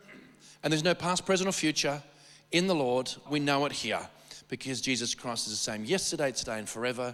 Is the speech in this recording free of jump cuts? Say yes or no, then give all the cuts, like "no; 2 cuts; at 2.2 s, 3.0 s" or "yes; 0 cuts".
no; 1 cut; at 3.3 s